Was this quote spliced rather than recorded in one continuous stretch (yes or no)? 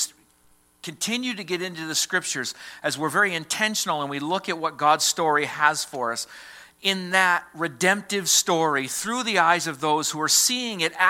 no